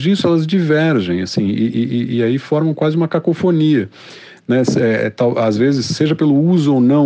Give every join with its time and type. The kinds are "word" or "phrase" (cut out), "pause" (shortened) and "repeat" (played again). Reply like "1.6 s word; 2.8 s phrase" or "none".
none